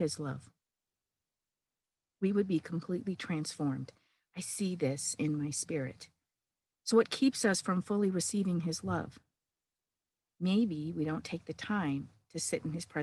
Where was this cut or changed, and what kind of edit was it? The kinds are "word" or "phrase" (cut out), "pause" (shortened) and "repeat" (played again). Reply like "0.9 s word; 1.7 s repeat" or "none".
none